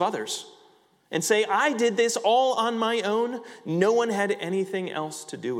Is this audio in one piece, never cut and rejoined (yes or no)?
yes